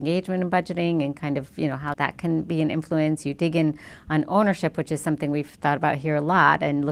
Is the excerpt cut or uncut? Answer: cut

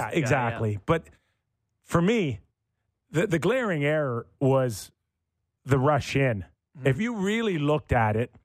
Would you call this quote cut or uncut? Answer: uncut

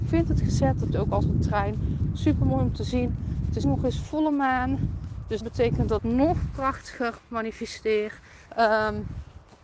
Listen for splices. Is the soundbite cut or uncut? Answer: cut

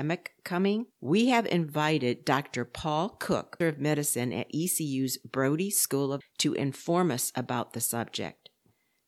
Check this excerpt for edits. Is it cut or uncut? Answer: cut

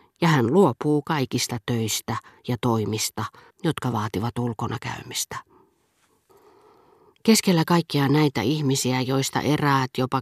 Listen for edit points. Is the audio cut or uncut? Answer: cut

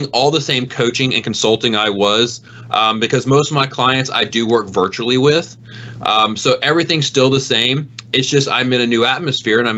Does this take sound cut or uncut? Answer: uncut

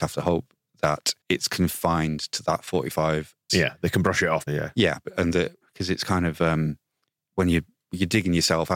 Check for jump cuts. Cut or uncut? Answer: cut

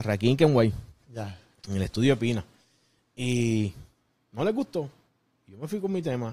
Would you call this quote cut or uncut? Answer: uncut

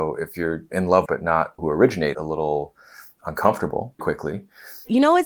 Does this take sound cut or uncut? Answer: cut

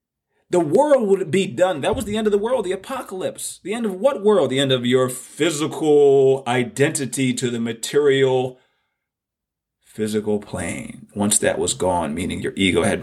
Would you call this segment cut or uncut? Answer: uncut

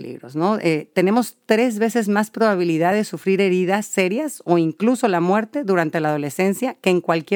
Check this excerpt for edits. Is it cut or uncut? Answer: uncut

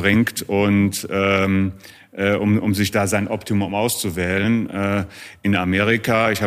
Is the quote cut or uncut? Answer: uncut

